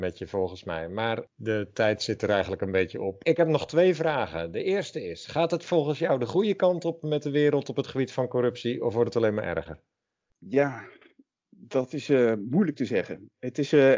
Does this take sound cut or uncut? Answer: uncut